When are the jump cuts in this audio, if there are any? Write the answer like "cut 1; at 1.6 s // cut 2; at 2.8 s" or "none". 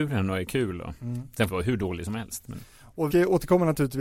cut 1; at 1.5 s // cut 2; at 3.1 s